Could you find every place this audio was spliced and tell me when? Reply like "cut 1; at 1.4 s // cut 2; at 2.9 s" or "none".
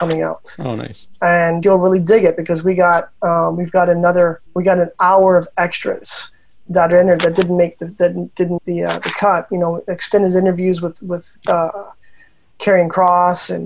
cut 1; at 1.6 s // cut 2; at 4.5 s // cut 3; at 8.6 s